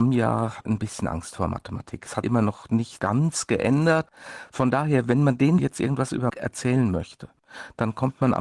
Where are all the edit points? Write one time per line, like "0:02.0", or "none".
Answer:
0:02.2
0:03.0
0:05.6
0:06.3